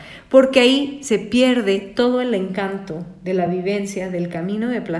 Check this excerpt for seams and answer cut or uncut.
uncut